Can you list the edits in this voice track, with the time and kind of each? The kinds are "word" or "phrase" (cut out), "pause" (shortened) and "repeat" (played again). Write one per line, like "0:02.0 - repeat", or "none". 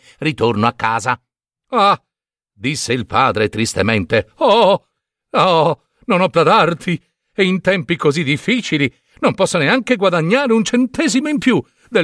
0:06.3 - word